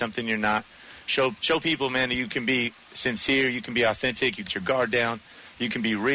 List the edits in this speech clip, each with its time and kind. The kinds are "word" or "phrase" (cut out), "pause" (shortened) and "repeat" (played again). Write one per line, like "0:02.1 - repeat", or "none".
0:04.5 - word